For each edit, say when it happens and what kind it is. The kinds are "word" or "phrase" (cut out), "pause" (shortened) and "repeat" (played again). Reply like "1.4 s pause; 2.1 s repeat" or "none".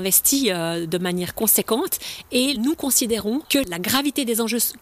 none